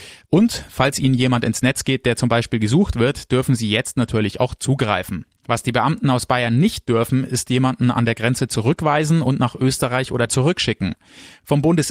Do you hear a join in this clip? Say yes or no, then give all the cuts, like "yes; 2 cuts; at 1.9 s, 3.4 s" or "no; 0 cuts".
yes; 1 cut; at 10.3 s